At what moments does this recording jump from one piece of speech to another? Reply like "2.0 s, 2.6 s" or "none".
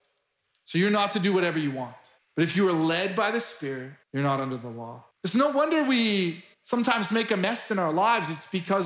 2.2 s, 4.0 s, 5.1 s, 6.5 s